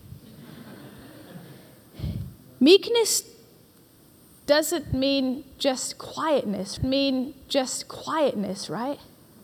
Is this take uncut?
no; 1 cut; at 6.8 s

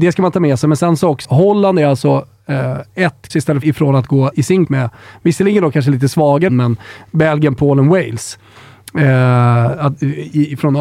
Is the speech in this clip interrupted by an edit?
yes; 6 cuts; at 1.2 s, 3.3 s, 3.6 s, 4.3 s, 4.6 s, 6.5 s

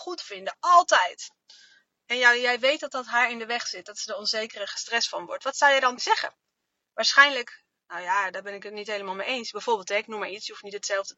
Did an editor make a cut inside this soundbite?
yes; 1 cut; at 6.0 s

